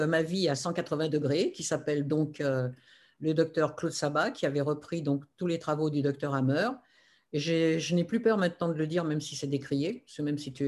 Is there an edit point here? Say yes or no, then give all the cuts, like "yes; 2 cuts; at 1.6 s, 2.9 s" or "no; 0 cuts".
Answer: no; 0 cuts